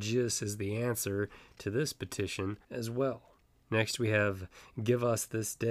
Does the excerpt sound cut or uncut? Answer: cut